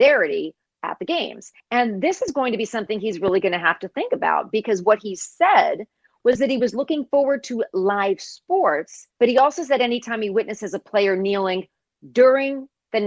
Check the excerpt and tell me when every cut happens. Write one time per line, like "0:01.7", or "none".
0:01.6
0:09.1